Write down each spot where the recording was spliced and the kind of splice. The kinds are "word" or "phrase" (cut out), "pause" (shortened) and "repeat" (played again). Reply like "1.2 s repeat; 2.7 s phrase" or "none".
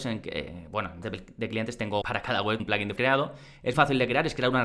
1.0 s word; 2.0 s word; 2.6 s word; 3.0 s word; 3.7 s word